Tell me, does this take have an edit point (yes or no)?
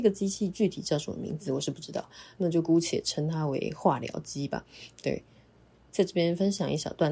no